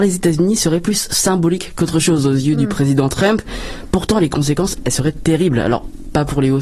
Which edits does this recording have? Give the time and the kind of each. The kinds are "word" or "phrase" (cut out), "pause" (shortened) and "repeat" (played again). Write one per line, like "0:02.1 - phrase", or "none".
none